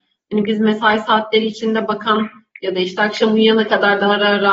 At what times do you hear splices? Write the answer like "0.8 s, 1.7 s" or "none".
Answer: none